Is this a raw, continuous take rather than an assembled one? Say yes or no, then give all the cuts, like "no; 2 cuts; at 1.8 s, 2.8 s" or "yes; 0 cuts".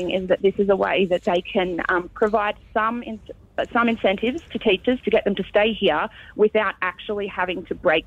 yes; 0 cuts